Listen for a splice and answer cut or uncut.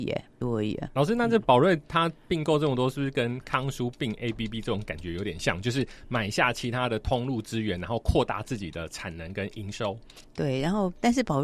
uncut